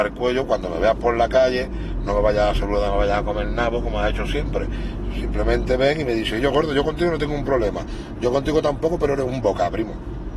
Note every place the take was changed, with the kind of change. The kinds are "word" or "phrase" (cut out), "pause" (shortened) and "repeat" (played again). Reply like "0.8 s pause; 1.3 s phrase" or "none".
none